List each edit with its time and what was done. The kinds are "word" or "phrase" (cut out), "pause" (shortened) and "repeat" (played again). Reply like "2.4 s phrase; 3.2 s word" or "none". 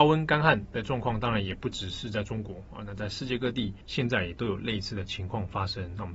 3.8 s pause

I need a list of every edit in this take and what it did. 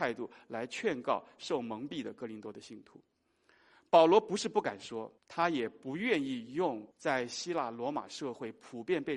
5.2 s pause; 6.9 s pause

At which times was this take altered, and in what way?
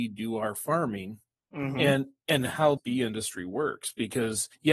2.8 s word

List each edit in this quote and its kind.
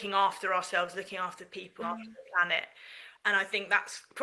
1.8 s phrase

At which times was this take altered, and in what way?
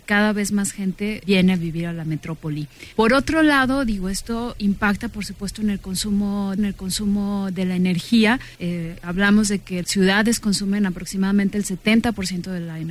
1.2 s word; 2.9 s pause; 6.6 s repeat; 8.5 s pause; 9.8 s word

